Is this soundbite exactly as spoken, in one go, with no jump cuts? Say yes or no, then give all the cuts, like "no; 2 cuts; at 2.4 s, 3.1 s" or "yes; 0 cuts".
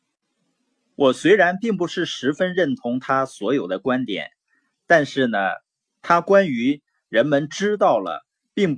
yes; 0 cuts